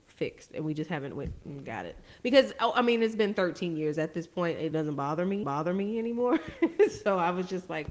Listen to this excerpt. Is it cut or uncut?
cut